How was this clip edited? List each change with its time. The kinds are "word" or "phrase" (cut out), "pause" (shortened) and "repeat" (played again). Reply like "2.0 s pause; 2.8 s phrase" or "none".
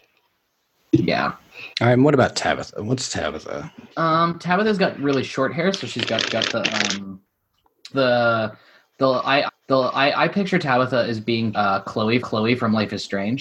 1.7 s pause; 3.9 s pause; 6.3 s repeat; 7.9 s word; 9.5 s repeat; 11.5 s word; 12.2 s repeat